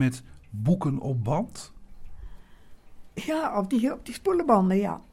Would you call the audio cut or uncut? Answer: cut